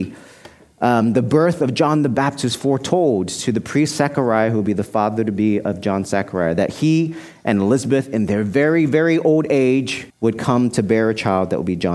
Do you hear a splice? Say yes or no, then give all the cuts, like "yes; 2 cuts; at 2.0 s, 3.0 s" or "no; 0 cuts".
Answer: yes; 1 cut; at 10.1 s